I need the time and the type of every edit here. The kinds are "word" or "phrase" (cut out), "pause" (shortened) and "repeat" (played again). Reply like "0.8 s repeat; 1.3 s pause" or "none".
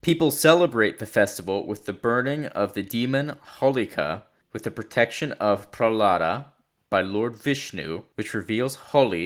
none